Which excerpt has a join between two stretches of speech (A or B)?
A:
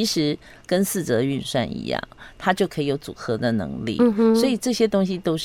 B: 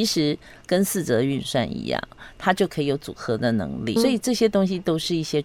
B